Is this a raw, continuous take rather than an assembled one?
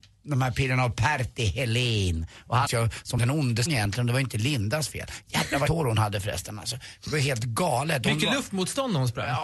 no; 3 cuts; at 2.7 s, 3.7 s, 5.7 s

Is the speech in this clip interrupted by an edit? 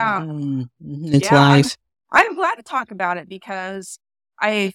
no; 0 cuts

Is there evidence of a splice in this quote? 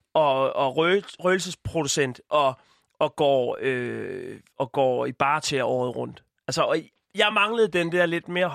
no; 0 cuts

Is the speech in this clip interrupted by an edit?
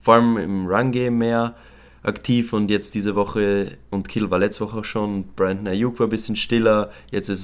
no; 0 cuts

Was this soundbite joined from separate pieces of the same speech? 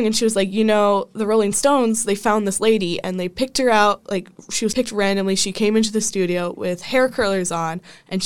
no; 0 cuts

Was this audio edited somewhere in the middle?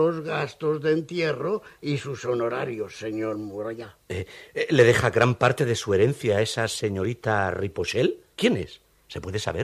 yes; 1 cut; at 8.3 s

